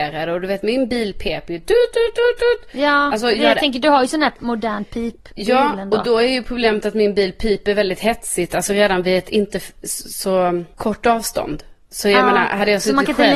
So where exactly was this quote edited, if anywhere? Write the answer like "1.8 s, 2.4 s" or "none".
none